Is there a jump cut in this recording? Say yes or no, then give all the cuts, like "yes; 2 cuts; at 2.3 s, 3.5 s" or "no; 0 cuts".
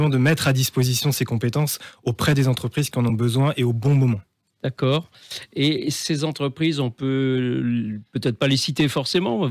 no; 0 cuts